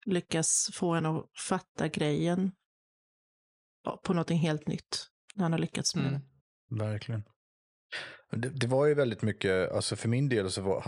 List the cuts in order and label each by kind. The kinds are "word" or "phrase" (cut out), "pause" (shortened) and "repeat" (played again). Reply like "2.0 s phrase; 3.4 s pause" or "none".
6.4 s pause